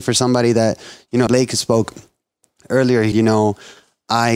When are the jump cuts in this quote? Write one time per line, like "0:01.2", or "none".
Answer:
0:01.3
0:03.1